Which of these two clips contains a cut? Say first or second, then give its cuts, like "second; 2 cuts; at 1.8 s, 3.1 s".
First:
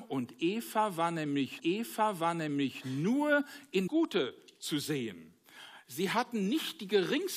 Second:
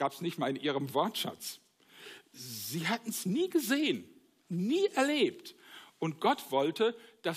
first; 2 cuts; at 1.6 s, 3.9 s